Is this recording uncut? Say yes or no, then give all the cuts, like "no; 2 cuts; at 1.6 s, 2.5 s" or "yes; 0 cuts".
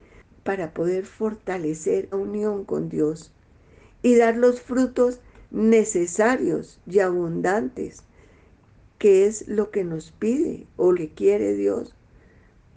no; 2 cuts; at 2.1 s, 10.9 s